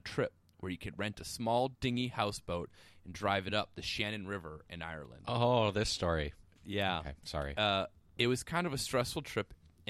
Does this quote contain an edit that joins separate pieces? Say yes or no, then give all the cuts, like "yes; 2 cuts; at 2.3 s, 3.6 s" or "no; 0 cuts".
no; 0 cuts